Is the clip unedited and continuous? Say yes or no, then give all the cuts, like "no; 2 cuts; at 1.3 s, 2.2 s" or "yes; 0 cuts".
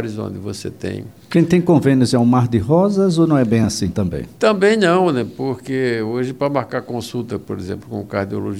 yes; 0 cuts